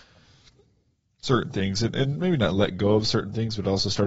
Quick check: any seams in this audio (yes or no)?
no